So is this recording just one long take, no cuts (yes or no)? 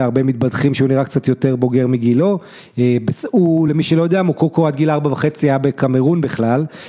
yes